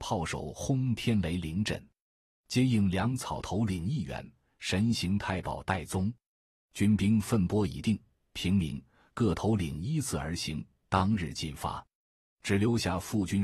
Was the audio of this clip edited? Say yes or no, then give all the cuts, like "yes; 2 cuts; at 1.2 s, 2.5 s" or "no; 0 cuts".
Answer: no; 0 cuts